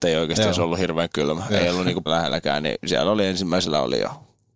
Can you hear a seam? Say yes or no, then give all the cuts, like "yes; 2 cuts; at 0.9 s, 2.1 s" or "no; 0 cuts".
yes; 1 cut; at 2.1 s